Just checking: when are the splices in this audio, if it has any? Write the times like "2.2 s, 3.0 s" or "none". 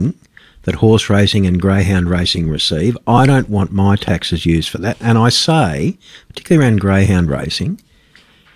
none